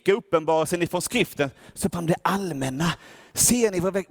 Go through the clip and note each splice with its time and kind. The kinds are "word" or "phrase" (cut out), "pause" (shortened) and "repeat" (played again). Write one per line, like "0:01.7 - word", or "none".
0:01.9 - word